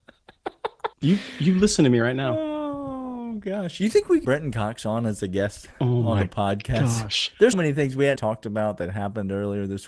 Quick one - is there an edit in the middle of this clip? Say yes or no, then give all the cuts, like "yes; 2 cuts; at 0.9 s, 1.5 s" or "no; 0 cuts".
yes; 4 cuts; at 0.9 s, 4.2 s, 7.5 s, 8.2 s